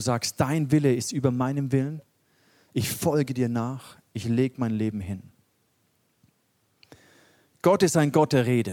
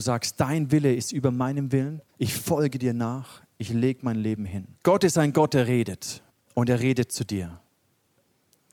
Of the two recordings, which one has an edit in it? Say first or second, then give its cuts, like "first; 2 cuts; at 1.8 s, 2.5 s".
second; 3 cuts; at 2.1 s, 4.7 s, 6.3 s